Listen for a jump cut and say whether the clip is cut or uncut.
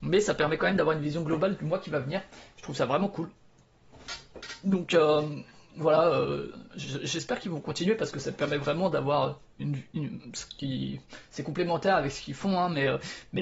uncut